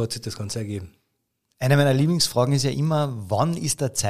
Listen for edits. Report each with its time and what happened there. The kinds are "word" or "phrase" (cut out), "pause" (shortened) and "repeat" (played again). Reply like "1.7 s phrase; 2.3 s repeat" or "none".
none

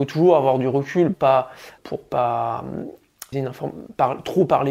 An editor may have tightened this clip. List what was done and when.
1.1 s word; 1.8 s word; 3.3 s word

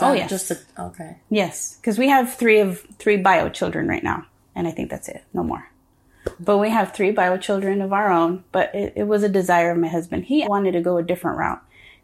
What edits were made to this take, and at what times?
4.4 s pause; 10.4 s word

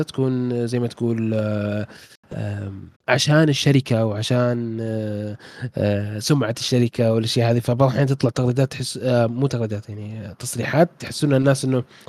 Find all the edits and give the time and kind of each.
3.0 s pause

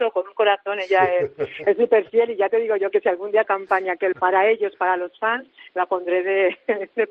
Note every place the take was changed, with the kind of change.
3.4 s phrase; 4.1 s word

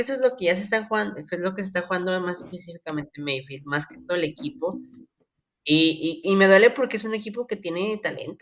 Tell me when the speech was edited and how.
6.2 s word

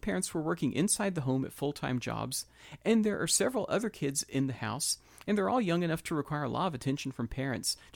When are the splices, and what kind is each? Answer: none

